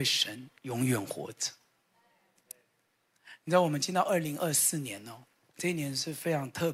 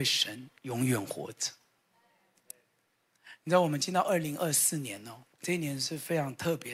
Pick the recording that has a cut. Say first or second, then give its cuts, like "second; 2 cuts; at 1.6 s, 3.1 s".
second; 1 cut; at 5.3 s